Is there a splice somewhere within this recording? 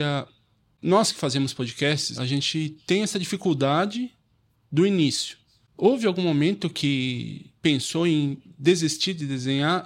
yes; 1 cut; at 2.1 s

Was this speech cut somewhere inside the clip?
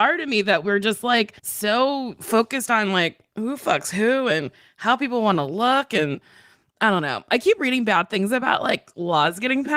yes; 1 cut; at 1.4 s

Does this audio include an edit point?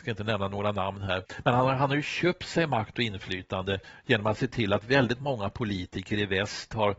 no; 0 cuts

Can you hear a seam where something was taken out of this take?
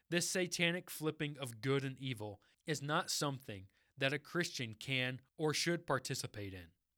no; 0 cuts

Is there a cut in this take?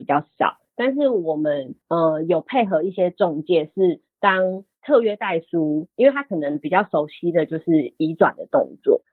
yes; 1 cut; at 1.8 s

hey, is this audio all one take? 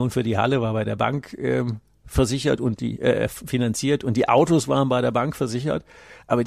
yes; 0 cuts

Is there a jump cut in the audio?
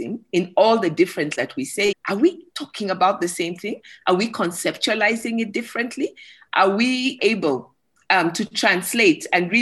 yes; 4 cuts; at 1.3 s, 1.9 s, 2.5 s, 7.2 s

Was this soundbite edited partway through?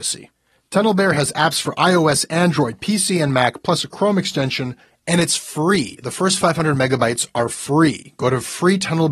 no; 0 cuts

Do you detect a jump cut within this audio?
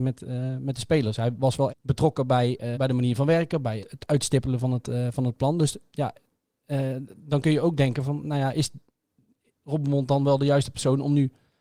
yes; 3 cuts; at 1.7 s, 2.7 s, 3.8 s

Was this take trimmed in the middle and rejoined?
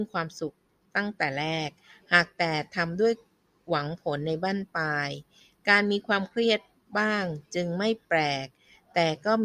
no; 0 cuts

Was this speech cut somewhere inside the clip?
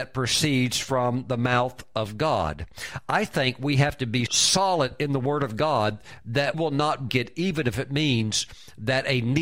yes; 3 cuts; at 4.3 s, 6.5 s, 7.1 s

